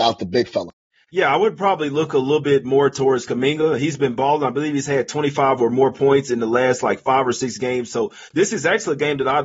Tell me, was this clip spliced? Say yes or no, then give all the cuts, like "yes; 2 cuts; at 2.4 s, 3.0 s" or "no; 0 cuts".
no; 0 cuts